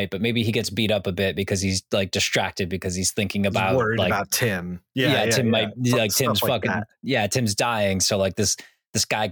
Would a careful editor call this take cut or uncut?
uncut